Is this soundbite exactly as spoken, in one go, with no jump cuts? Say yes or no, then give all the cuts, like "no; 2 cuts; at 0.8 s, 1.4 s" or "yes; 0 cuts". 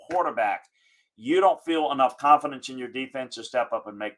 yes; 0 cuts